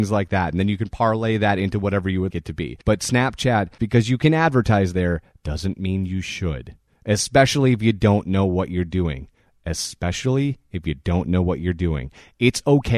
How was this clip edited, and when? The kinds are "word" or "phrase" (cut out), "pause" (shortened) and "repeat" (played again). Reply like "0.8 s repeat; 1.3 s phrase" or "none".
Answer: 2.3 s word; 2.8 s pause; 3.8 s word